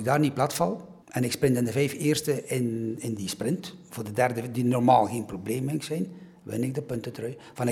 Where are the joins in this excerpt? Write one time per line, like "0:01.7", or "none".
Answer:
0:01.0